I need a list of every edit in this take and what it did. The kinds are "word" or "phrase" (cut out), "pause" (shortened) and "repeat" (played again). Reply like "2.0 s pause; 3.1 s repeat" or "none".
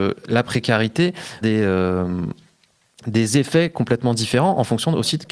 1.4 s phrase